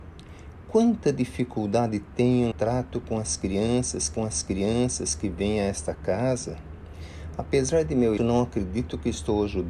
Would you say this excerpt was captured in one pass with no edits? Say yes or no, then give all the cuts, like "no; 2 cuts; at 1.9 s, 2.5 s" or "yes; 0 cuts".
no; 3 cuts; at 2.5 s, 4.2 s, 8.2 s